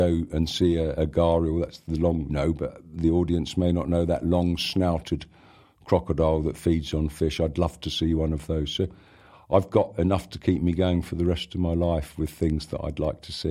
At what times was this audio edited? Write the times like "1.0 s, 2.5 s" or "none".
1.0 s, 2.3 s